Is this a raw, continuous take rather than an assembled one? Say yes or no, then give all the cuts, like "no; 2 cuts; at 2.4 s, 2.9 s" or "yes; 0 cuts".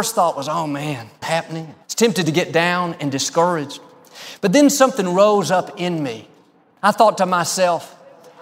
no; 2 cuts; at 1.2 s, 1.8 s